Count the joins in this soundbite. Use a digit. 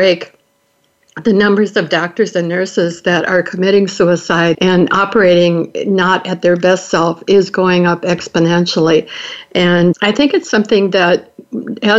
2